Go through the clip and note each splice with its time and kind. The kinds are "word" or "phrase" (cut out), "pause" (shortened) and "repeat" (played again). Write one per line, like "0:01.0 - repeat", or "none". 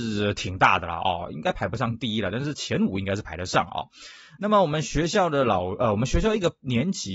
none

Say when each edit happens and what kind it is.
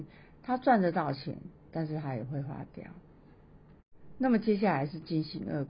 none

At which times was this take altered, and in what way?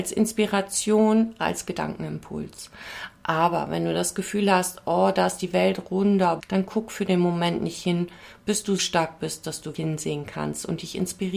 0:01.4 - word
0:06.4 - phrase
0:08.8 - word
0:09.7 - word

